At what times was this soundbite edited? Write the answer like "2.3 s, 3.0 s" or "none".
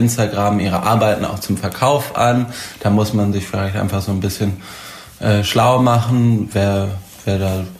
none